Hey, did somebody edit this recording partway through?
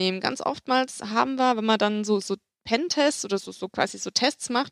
no; 0 cuts

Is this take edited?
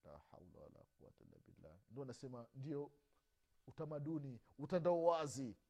no; 0 cuts

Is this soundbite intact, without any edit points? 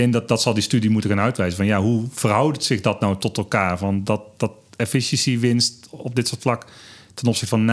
yes; 0 cuts

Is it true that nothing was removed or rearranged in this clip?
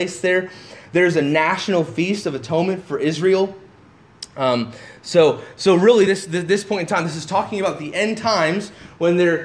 yes; 0 cuts

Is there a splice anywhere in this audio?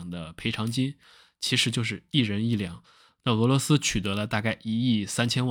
no; 0 cuts

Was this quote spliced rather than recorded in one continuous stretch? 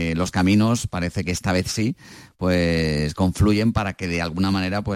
no; 0 cuts

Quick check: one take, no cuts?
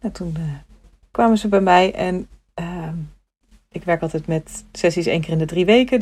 yes; 0 cuts

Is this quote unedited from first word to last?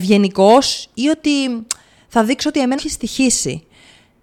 no; 1 cut; at 2.8 s

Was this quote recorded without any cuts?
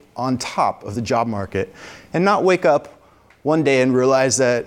yes; 0 cuts

